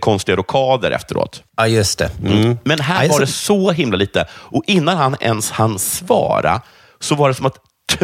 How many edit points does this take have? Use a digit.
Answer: 1